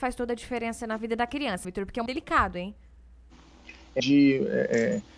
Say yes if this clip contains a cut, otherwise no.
yes